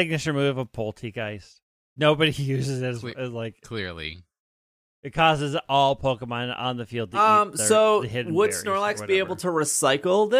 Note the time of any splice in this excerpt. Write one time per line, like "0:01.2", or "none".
none